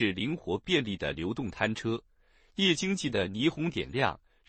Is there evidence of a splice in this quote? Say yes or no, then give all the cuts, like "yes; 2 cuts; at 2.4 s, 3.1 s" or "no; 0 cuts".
no; 0 cuts